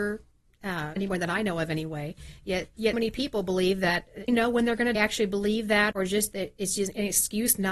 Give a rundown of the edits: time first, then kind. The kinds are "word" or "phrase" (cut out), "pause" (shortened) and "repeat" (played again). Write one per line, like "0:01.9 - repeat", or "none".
0:01.0 - word
0:02.9 - word
0:04.3 - phrase
0:04.9 - phrase
0:05.9 - word